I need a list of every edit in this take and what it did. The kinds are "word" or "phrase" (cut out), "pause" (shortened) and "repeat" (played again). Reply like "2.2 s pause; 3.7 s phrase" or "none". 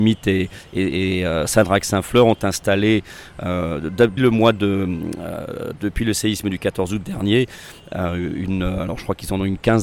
4.2 s word